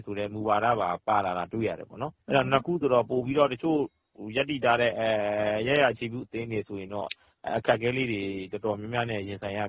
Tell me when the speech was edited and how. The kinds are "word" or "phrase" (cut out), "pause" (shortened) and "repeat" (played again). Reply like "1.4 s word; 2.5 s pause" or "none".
2.2 s pause